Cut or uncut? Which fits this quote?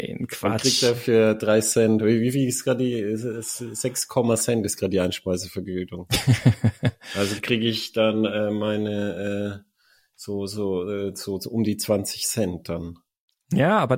uncut